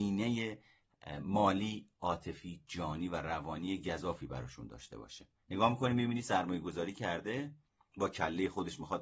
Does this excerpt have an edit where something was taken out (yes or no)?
no